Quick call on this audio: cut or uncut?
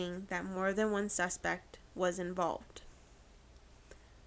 uncut